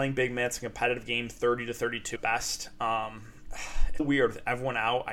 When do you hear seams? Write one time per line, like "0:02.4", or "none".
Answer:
0:02.2
0:04.0